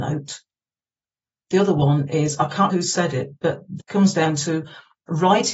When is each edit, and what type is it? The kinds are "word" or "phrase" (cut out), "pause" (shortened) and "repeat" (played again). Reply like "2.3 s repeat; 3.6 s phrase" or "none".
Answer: 2.7 s word; 3.8 s word